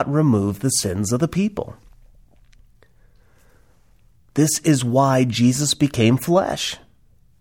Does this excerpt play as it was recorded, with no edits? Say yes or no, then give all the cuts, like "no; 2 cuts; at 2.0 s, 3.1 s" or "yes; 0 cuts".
yes; 0 cuts